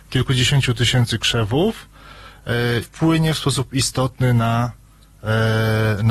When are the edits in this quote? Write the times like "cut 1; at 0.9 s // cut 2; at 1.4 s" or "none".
cut 1; at 2.8 s